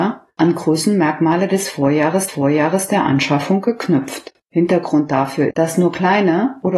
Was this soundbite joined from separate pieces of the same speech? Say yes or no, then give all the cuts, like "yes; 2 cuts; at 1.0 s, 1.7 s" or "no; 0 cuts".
yes; 3 cuts; at 2.3 s, 4.4 s, 5.5 s